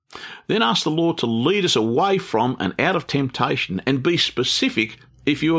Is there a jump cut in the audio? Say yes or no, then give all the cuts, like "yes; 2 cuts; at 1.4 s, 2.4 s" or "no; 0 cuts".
no; 0 cuts